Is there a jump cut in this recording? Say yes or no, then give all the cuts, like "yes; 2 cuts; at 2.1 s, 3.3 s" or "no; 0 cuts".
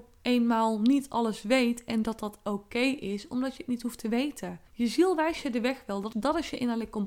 yes; 2 cuts; at 4.7 s, 6.1 s